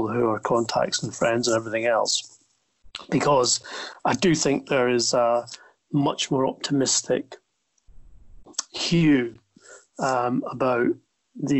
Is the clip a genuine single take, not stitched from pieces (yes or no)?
yes